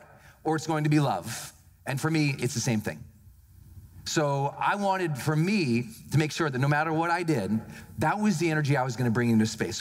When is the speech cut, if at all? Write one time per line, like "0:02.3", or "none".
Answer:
none